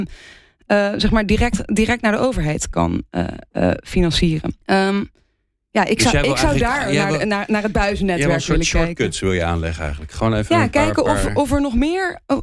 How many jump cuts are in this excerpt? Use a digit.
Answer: 1